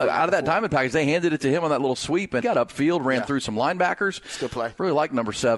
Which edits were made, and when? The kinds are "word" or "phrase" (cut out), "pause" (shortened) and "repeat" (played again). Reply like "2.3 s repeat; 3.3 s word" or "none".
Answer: 2.4 s phrase